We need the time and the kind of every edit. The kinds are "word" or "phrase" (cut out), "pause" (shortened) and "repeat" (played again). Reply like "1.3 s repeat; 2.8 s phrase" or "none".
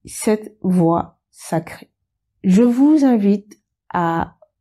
none